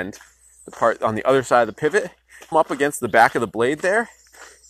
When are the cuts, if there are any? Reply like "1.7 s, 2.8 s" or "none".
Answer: 2.5 s